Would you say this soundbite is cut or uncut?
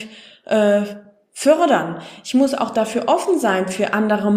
uncut